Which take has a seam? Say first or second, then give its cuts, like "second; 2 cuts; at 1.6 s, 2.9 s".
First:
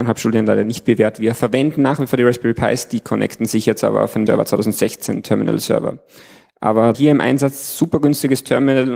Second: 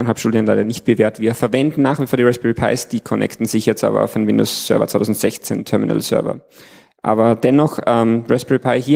first; 2 cuts; at 4.3 s, 6.9 s